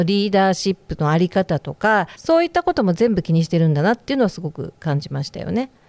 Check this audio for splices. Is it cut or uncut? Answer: cut